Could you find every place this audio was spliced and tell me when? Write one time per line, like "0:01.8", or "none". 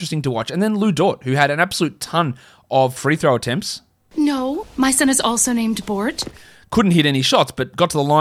none